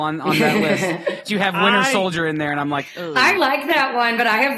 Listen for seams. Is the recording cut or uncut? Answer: cut